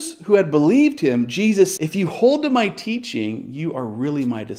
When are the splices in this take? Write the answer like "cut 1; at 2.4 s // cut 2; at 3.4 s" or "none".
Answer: cut 1; at 1.8 s